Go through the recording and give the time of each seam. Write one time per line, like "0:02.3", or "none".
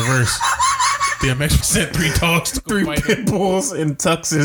0:01.6